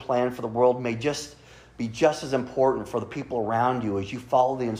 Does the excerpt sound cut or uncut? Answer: uncut